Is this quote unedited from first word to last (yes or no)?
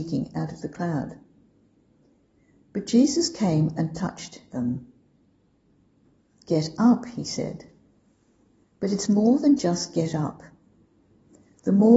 yes